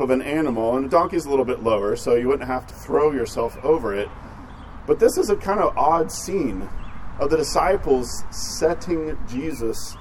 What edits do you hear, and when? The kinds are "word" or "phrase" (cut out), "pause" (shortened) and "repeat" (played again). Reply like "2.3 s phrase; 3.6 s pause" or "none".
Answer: 2.7 s word